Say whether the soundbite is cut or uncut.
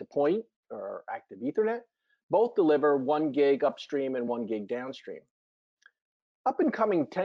uncut